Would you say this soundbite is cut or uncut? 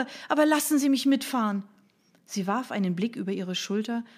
uncut